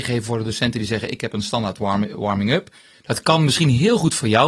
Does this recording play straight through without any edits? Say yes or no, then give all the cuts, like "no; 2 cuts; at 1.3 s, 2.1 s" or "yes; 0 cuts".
yes; 0 cuts